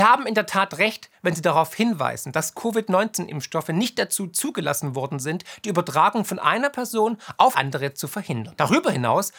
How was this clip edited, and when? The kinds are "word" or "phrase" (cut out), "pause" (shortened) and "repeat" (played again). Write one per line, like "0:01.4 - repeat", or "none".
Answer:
0:07.5 - word